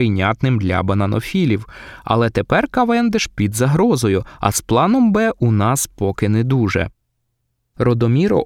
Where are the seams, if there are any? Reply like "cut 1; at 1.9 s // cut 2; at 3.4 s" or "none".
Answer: none